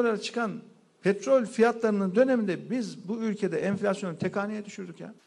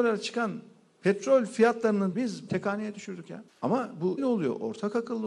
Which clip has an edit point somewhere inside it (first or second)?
second